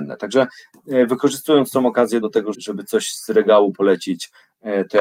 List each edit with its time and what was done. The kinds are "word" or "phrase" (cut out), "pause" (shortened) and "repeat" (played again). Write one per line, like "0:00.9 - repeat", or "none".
0:02.2 - word
0:02.5 - word